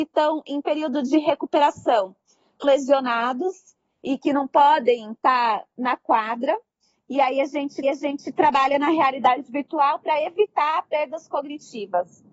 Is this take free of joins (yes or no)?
no